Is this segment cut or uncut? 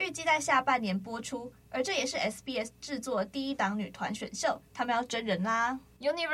uncut